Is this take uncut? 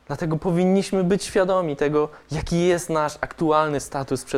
yes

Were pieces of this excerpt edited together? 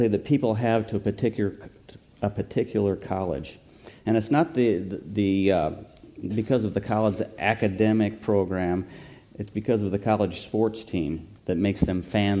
yes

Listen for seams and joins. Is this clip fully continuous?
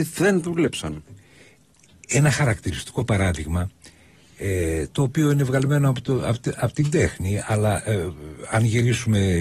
yes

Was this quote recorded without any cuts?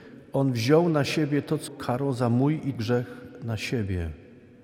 no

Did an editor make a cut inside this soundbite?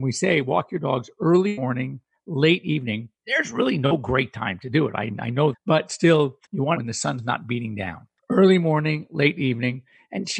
yes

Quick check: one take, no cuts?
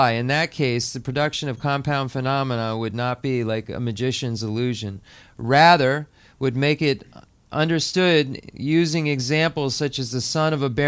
yes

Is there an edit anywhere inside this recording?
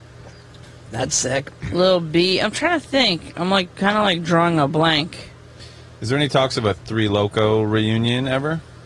no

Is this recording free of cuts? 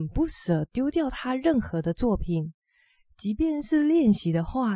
yes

